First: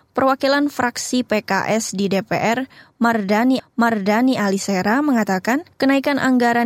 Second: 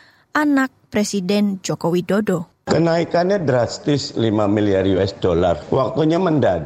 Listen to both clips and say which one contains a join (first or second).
first